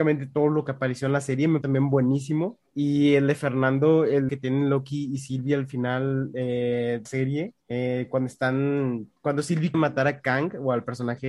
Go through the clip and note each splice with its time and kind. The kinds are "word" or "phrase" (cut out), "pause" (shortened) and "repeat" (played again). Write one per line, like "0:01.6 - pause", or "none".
0:01.6 - word
0:02.7 - pause
0:04.3 - phrase
0:07.1 - phrase
0:07.6 - pause
0:09.2 - pause
0:09.7 - word